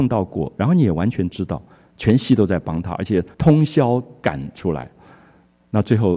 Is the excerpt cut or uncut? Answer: cut